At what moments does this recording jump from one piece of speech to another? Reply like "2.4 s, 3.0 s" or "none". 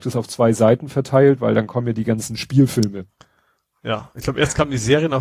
none